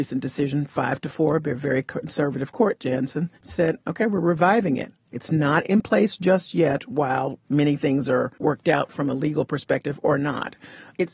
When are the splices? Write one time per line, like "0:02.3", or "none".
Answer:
0:03.4
0:08.3

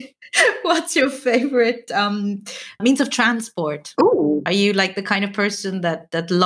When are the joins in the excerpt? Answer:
0:02.8

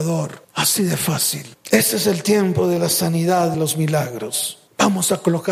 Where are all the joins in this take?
0:03.5

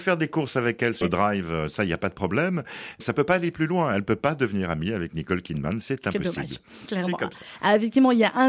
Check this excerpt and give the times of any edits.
0:01.0
0:03.0

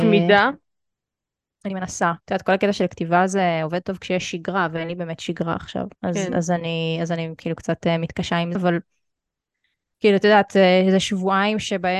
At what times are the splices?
0:02.2
0:06.0
0:08.5

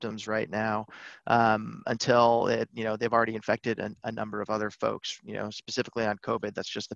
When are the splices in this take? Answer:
none

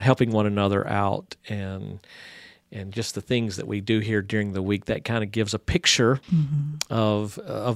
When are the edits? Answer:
0:06.2

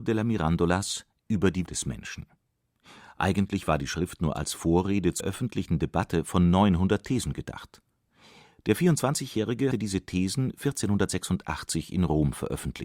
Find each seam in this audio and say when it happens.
0:01.7
0:05.2
0:09.7

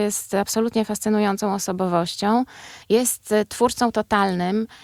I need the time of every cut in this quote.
0:02.8

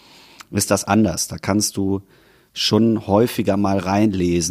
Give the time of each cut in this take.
none

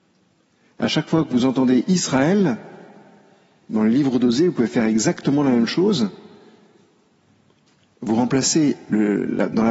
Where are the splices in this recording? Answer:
none

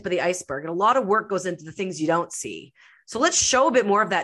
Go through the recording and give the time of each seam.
none

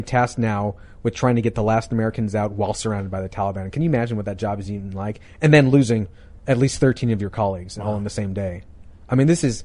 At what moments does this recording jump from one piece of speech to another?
none

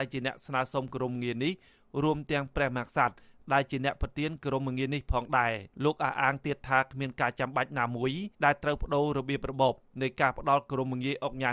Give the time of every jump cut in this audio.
0:05.7
0:08.3

